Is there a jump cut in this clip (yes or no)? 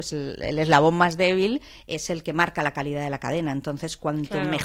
no